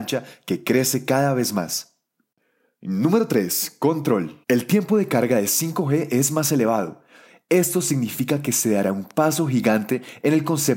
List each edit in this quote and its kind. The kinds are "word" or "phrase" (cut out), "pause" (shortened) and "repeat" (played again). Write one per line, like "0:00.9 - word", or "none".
0:04.4 - pause

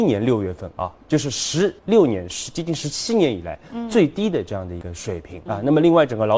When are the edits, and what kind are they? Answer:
0:01.8 - pause
0:05.5 - word

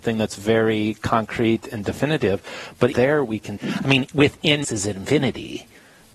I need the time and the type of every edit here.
0:02.9 - word
0:03.6 - word
0:04.6 - word

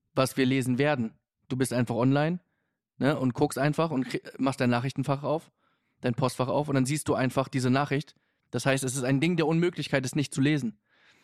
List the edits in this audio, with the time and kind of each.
none

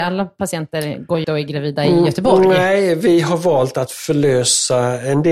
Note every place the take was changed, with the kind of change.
0:01.2 - word

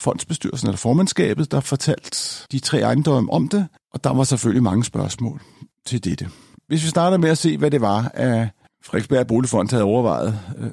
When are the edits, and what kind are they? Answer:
0:02.5 - pause

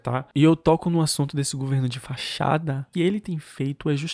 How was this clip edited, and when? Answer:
0:02.9 - phrase

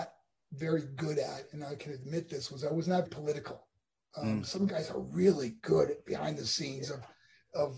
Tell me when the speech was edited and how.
0:03.1 - word

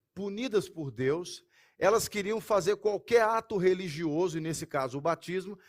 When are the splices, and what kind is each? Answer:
none

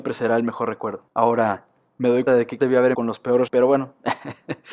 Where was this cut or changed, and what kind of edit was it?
0:02.3 - word
0:02.6 - word
0:02.9 - word
0:03.5 - word

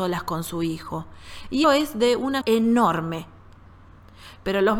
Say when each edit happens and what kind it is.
0:01.6 - word
0:02.4 - word

